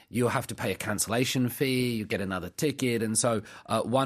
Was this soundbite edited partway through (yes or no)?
no